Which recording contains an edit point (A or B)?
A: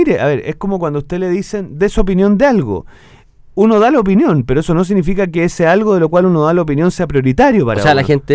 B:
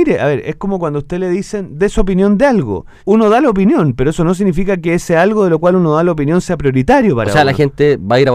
B